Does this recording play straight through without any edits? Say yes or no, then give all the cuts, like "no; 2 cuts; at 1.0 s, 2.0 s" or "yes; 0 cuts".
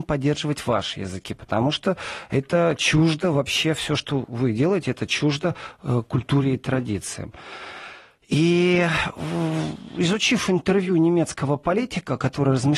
yes; 0 cuts